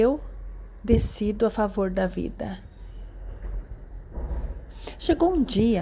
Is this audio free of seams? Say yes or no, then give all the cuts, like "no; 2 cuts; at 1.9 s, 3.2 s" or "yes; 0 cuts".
yes; 0 cuts